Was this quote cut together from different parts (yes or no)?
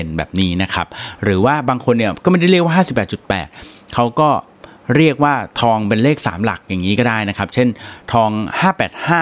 yes